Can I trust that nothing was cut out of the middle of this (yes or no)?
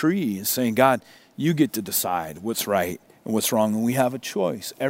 yes